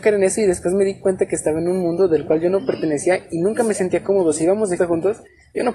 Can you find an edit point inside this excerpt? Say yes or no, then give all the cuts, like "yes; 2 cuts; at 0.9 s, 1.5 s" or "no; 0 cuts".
yes; 1 cut; at 4.8 s